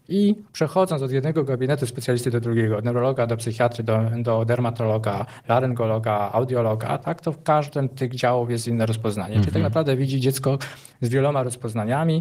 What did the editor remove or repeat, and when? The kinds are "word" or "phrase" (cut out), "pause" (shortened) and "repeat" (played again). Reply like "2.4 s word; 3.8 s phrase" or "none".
none